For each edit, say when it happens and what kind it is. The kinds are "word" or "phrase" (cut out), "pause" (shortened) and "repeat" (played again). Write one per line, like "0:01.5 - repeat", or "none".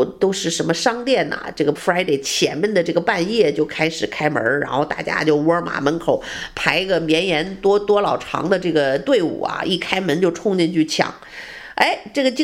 0:01.8 - word